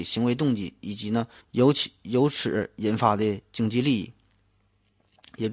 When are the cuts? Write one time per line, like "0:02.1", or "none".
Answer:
0:01.4